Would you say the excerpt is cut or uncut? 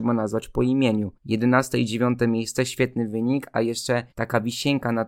cut